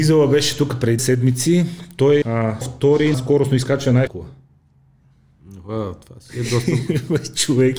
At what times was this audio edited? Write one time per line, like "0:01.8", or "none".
0:01.0
0:02.2
0:02.6
0:03.1
0:04.1